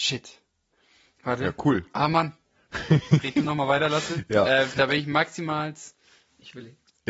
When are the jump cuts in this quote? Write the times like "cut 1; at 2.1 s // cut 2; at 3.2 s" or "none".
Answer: none